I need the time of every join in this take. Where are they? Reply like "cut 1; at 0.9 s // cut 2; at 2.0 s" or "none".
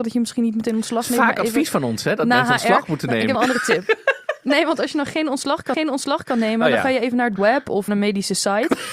cut 1; at 3.3 s // cut 2; at 5.7 s // cut 3; at 7.4 s // cut 4; at 7.9 s